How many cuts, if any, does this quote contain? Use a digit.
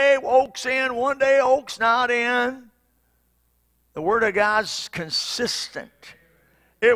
0